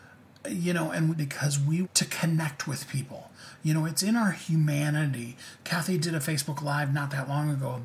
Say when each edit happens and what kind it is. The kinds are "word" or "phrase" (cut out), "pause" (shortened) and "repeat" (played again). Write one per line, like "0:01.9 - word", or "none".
0:01.1 - phrase
0:01.8 - word